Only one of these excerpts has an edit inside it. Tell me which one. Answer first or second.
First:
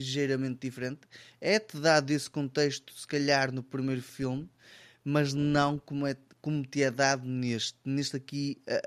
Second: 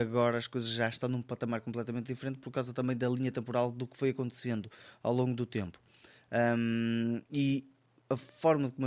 second